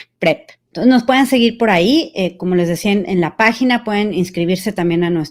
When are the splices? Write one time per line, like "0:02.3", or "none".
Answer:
none